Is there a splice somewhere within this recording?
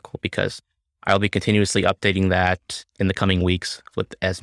no; 0 cuts

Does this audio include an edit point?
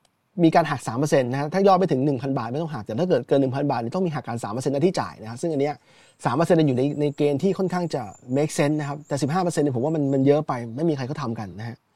no; 0 cuts

